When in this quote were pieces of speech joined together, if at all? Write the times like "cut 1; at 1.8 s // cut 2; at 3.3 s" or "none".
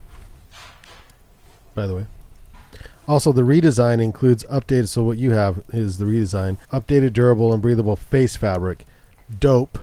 cut 1; at 6.6 s